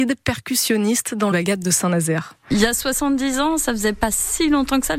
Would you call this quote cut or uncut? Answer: cut